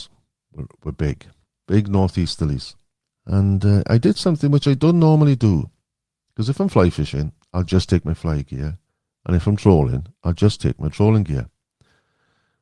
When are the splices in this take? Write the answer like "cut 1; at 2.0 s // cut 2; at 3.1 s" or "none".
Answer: none